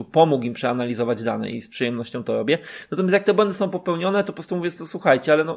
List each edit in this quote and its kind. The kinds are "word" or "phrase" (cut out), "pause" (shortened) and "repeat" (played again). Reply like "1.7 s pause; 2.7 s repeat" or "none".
none